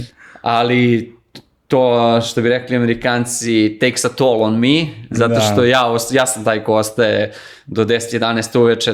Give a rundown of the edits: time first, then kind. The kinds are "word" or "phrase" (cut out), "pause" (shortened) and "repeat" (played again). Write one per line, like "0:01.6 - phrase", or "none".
none